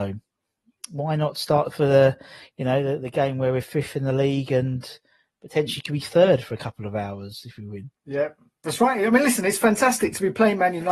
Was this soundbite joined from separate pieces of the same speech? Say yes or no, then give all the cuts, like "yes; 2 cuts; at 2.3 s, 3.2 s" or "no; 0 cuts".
no; 0 cuts